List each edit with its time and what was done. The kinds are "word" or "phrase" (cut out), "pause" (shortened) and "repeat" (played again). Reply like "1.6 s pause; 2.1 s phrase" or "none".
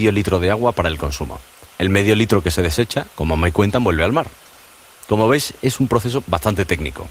1.7 s pause